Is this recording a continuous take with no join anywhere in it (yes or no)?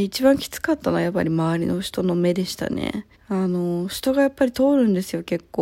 no